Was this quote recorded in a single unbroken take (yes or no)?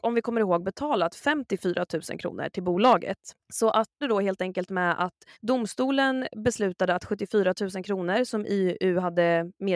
no